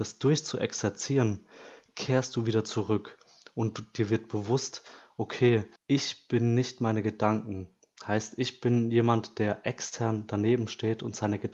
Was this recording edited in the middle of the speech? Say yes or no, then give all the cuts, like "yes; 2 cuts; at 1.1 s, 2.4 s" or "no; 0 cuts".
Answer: yes; 1 cut; at 5.8 s